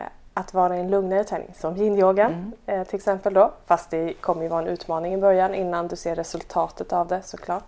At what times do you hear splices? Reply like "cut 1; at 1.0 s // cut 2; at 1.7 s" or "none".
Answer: none